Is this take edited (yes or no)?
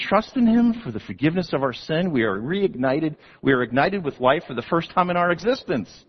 no